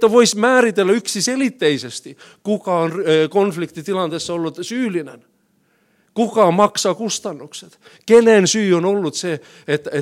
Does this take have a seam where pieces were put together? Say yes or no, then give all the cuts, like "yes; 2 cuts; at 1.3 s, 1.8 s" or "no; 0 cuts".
no; 0 cuts